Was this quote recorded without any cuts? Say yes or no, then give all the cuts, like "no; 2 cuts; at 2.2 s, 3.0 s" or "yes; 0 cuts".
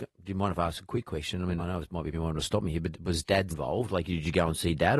no; 4 cuts; at 1.6 s, 2.1 s, 2.9 s, 3.5 s